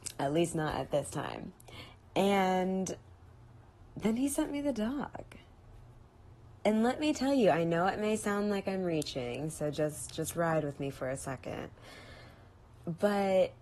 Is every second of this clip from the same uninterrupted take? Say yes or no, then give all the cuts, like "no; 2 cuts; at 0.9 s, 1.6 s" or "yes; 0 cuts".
yes; 0 cuts